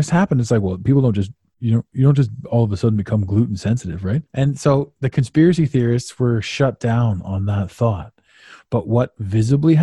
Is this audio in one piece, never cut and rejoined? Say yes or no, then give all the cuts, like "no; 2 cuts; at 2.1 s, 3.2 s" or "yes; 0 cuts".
no; 1 cut; at 4.3 s